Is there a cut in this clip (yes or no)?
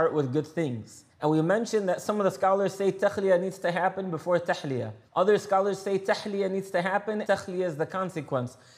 yes